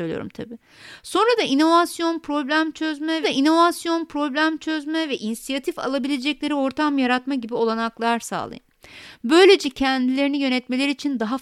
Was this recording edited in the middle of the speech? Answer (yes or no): yes